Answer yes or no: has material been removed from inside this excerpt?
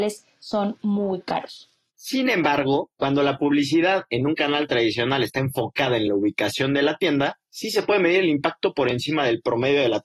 no